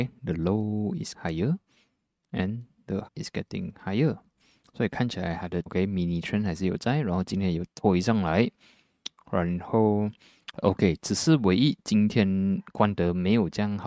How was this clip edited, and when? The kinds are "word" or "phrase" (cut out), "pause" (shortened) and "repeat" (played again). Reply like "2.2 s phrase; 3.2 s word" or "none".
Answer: 1.1 s word; 3.1 s word; 5.7 s word